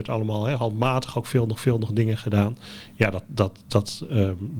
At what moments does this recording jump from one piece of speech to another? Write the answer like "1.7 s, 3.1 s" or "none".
1.5 s